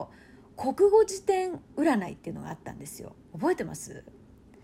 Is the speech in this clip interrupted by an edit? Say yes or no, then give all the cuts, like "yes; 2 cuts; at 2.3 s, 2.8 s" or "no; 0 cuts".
yes; 1 cut; at 1.7 s